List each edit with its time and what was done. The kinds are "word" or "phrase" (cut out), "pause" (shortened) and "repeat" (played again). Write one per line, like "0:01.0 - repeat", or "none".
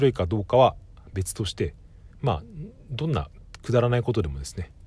0:02.1 - pause